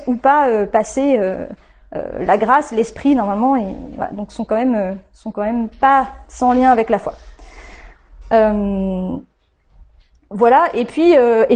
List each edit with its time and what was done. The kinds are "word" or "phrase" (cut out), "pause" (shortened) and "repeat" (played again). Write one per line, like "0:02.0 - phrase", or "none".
none